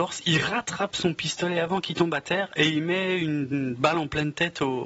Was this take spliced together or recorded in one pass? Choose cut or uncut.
uncut